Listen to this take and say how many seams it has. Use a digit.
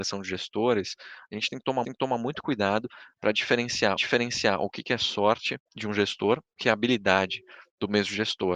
4